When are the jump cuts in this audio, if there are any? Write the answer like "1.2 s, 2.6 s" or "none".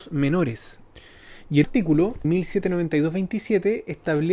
1.6 s, 2.2 s